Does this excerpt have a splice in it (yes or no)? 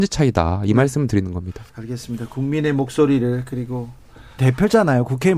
yes